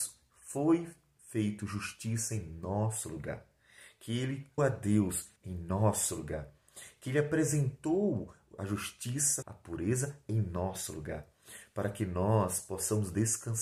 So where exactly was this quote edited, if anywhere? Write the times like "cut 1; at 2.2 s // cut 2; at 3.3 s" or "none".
cut 1; at 4.6 s // cut 2; at 5.4 s // cut 3; at 9.4 s